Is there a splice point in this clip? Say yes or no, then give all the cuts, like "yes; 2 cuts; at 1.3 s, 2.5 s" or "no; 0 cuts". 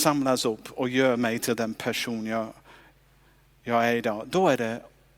no; 0 cuts